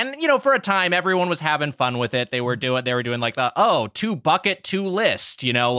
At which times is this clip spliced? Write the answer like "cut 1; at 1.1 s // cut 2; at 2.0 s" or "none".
none